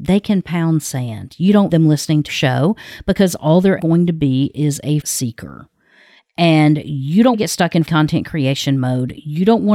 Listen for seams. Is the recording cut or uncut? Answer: cut